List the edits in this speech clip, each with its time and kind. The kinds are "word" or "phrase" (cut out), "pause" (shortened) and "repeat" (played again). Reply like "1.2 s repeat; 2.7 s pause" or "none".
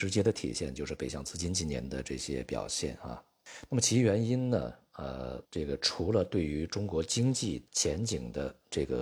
5.5 s pause; 7.7 s pause